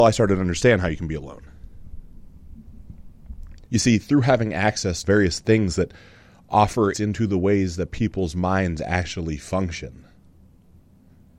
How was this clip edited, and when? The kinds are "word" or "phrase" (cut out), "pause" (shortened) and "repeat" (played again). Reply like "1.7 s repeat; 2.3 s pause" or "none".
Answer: 3.7 s pause; 5.0 s phrase; 6.9 s word